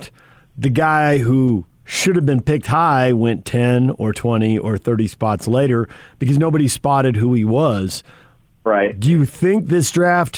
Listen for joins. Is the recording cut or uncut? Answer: uncut